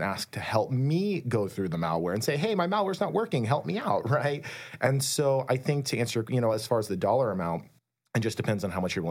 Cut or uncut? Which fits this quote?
uncut